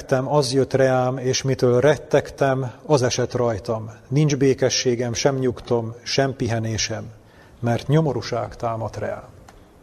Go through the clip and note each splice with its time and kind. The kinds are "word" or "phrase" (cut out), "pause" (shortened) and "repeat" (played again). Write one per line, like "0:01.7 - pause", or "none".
none